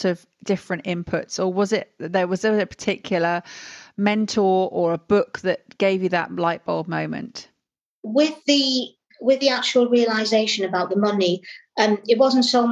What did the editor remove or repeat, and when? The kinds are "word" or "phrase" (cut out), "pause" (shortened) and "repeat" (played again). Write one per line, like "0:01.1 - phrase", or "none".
none